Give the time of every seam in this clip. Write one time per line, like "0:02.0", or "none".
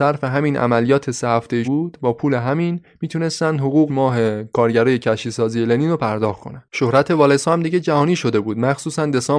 0:01.6
0:03.9
0:06.7